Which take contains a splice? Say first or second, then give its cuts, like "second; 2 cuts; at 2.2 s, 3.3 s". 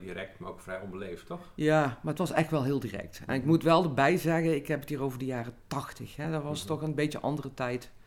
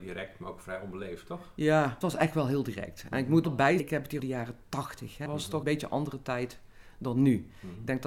second; 6 cuts; at 2.0 s, 3.4 s, 3.8 s, 4.2 s, 5.3 s, 5.6 s